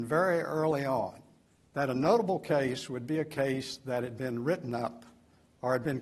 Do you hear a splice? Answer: yes; 1 cut; at 1.5 s

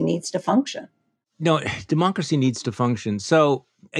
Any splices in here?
no; 0 cuts

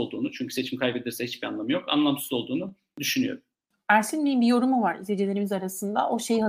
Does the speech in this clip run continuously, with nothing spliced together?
yes; 0 cuts

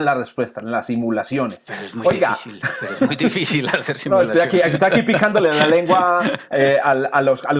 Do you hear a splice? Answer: no; 0 cuts

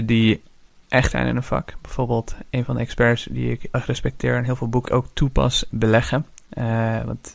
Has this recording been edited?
yes; 4 cuts; at 1.1 s, 3.7 s, 4.9 s, 5.7 s

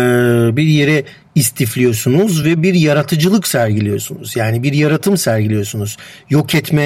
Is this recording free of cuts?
yes; 0 cuts

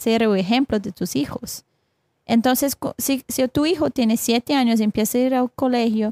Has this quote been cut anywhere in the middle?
no; 0 cuts

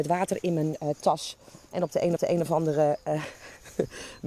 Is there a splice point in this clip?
yes; 1 cut; at 2.2 s

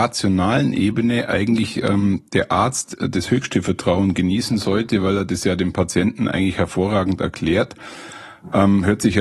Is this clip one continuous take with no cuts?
yes; 0 cuts

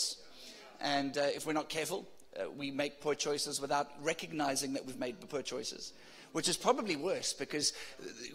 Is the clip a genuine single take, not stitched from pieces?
yes; 0 cuts

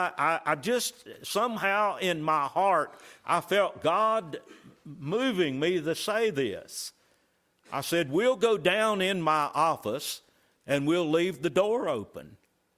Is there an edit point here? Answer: no; 0 cuts

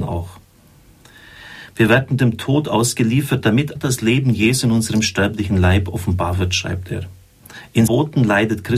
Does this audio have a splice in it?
yes; 2 cuts; at 3.8 s, 7.9 s

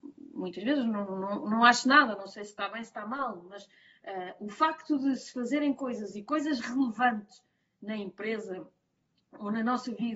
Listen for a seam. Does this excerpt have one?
no; 0 cuts

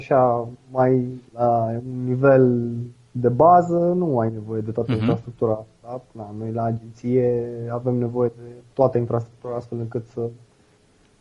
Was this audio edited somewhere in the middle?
yes; 1 cut; at 1.3 s

